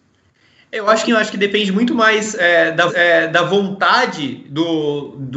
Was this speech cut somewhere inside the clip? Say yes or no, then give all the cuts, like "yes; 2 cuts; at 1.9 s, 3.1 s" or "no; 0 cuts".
yes; 2 cuts; at 1.1 s, 2.9 s